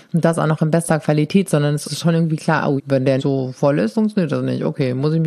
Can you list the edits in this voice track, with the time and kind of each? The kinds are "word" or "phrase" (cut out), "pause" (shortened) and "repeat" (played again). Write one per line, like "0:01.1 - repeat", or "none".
0:01.8 - word
0:02.8 - word
0:03.2 - word
0:03.9 - word